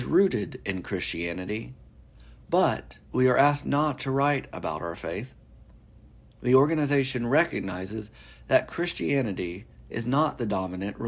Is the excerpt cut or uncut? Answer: uncut